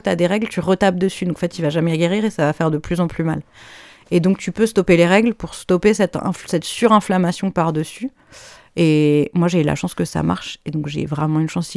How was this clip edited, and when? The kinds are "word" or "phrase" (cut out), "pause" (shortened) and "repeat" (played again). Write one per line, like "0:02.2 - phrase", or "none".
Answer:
none